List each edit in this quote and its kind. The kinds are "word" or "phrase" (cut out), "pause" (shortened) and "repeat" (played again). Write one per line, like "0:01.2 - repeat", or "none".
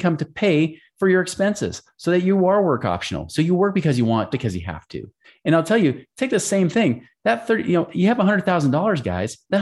0:04.3 - phrase
0:05.2 - pause